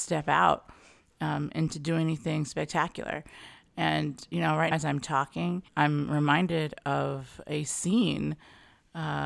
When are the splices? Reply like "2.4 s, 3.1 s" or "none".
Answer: 4.7 s, 5.7 s